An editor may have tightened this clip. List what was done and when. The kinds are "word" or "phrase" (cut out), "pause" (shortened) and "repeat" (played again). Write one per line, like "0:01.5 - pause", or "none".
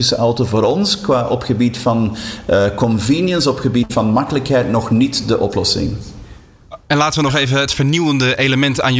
none

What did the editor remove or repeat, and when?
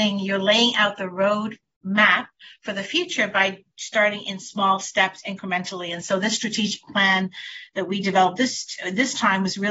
none

